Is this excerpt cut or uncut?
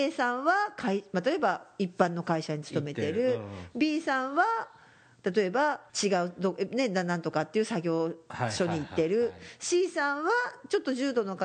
cut